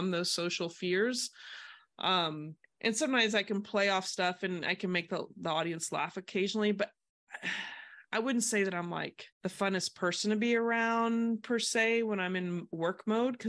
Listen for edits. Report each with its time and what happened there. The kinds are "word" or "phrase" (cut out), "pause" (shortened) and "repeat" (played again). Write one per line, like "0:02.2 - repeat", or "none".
0:02.6 - pause
0:09.3 - pause